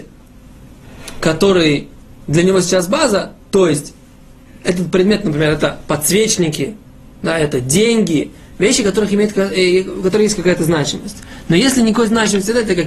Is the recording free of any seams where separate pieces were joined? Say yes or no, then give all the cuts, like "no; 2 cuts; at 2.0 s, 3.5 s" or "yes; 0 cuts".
yes; 0 cuts